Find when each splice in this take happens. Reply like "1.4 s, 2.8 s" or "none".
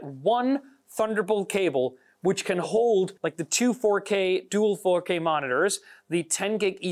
3.2 s